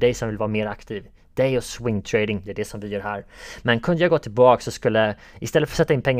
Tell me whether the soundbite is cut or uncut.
uncut